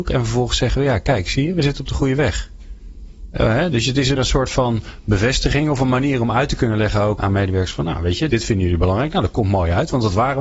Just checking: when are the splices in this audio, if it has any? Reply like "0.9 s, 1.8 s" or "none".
4.2 s, 7.2 s, 8.3 s